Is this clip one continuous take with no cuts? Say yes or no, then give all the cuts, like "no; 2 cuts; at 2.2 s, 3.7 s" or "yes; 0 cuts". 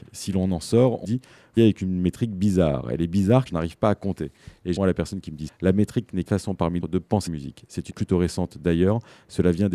no; 9 cuts; at 1.0 s, 1.6 s, 3.5 s, 4.8 s, 5.5 s, 6.3 s, 6.8 s, 7.3 s, 7.9 s